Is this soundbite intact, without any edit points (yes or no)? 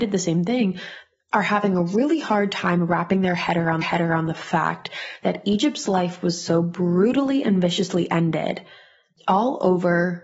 no